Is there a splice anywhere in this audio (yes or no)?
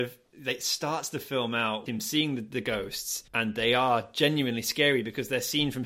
yes